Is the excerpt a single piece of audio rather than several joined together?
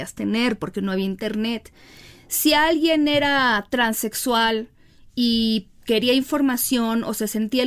yes; 0 cuts

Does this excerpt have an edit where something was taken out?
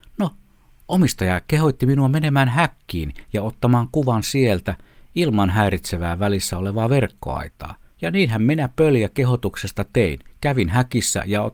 yes; 1 cut; at 7.9 s

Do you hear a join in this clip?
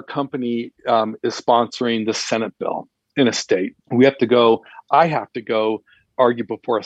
yes; 1 cut; at 3.8 s

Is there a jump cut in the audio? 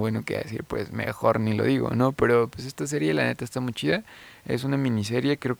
no; 0 cuts

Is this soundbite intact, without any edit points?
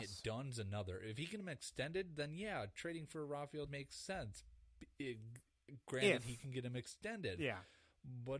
no; 2 cuts; at 1.4 s, 3.7 s

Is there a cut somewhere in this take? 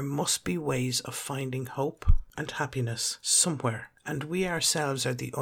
no; 0 cuts

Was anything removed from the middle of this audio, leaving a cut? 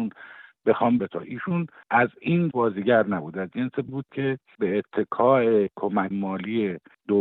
yes; 4 cuts; at 1.0 s, 2.5 s, 3.9 s, 6.1 s

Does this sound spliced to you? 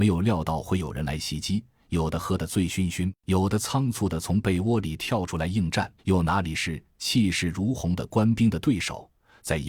yes; 1 cut; at 6.0 s

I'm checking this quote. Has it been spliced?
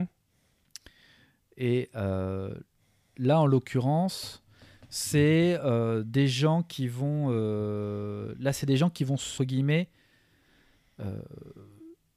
yes; 1 cut; at 9.4 s

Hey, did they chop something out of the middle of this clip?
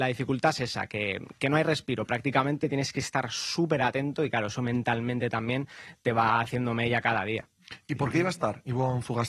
no; 0 cuts

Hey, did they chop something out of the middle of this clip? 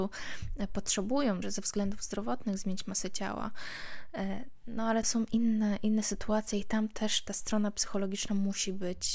yes; 3 cuts; at 1.4 s, 5.0 s, 7.3 s

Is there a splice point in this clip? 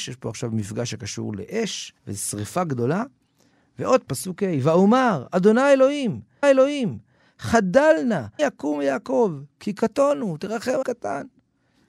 yes; 5 cuts; at 2.0 s, 4.1 s, 6.4 s, 8.4 s, 10.8 s

